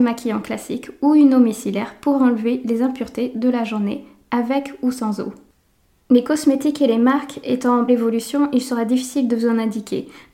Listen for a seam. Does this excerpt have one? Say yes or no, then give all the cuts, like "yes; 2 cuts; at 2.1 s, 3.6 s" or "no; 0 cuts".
yes; 1 cut; at 7.9 s